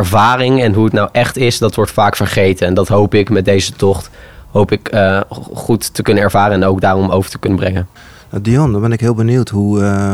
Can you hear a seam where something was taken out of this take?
no; 0 cuts

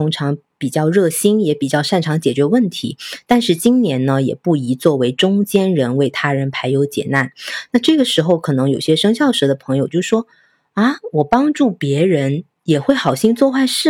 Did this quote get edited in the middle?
no; 0 cuts

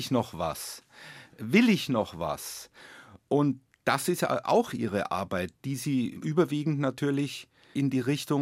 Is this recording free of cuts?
yes; 0 cuts

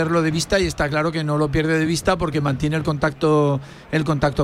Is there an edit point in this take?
no; 0 cuts

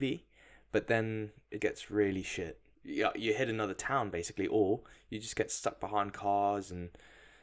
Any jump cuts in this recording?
yes; 2 cuts; at 1.6 s, 2.7 s

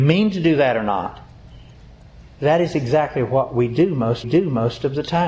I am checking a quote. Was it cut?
yes; 1 cut; at 4.2 s

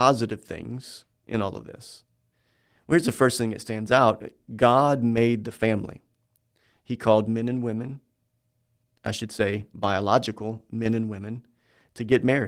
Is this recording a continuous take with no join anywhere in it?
yes; 0 cuts

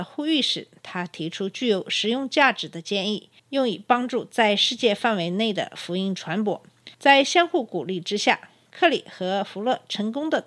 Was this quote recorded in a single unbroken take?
no; 2 cuts; at 3.4 s, 6.9 s

